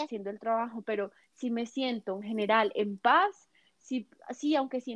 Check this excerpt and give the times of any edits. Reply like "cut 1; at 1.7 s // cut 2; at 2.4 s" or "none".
none